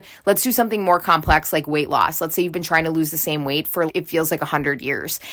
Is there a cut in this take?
yes; 1 cut; at 3.9 s

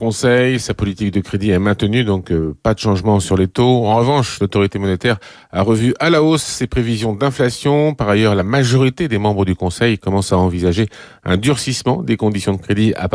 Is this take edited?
no; 0 cuts

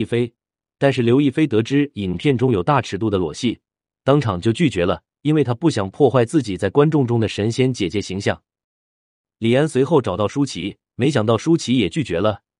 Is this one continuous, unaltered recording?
no; 2 cuts; at 5.1 s, 10.8 s

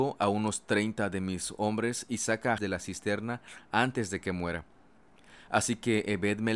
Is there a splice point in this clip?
yes; 1 cut; at 2.6 s

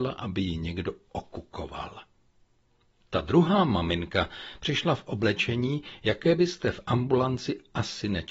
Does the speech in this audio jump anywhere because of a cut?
no; 0 cuts

